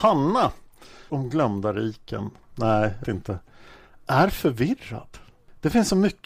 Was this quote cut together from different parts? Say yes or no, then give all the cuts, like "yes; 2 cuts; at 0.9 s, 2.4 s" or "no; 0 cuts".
yes; 2 cuts; at 1.1 s, 3.0 s